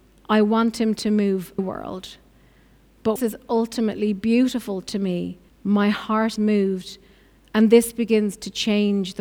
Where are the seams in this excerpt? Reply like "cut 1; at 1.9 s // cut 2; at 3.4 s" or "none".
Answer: cut 1; at 1.6 s // cut 2; at 3.2 s // cut 3; at 5.5 s // cut 4; at 6.4 s